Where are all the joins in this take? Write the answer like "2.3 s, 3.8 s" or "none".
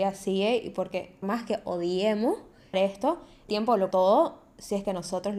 1.2 s, 2.7 s, 3.5 s, 3.9 s

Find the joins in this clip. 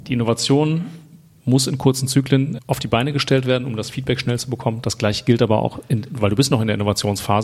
2.6 s

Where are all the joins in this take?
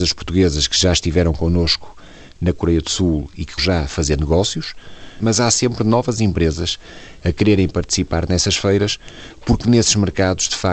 3.6 s

